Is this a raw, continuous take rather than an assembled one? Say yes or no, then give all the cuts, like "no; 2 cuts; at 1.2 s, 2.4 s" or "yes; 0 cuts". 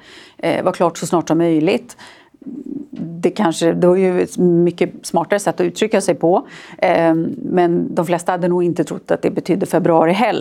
yes; 0 cuts